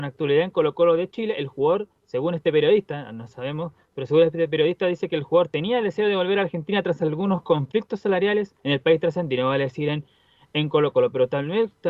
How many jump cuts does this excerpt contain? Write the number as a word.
one